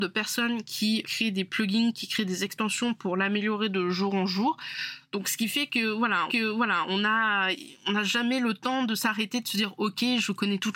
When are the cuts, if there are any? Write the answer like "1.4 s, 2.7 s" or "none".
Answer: 1.0 s, 6.3 s